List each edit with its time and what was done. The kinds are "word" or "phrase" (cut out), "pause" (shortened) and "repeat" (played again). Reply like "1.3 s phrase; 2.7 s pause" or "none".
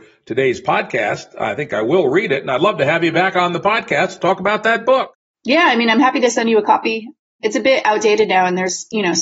none